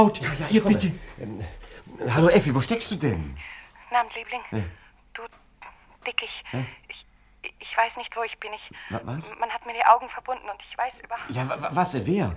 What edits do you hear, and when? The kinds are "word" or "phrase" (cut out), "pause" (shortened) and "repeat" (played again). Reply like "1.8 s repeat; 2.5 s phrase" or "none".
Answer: none